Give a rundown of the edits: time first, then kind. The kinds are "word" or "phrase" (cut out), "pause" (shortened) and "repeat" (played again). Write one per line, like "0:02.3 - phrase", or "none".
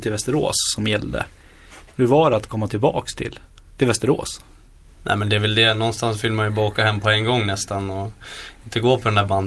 none